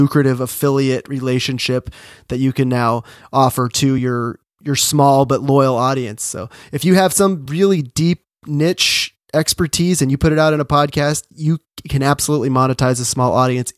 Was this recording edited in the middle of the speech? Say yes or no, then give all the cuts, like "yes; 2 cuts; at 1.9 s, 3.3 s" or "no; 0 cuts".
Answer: no; 0 cuts